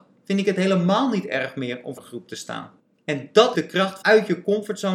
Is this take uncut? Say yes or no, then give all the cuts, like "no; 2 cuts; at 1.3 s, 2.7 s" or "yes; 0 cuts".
no; 4 cuts; at 2.0 s, 2.8 s, 3.5 s, 4.0 s